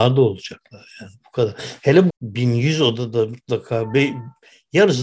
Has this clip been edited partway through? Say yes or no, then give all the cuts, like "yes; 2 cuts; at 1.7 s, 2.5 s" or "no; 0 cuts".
yes; 2 cuts; at 1.2 s, 2.1 s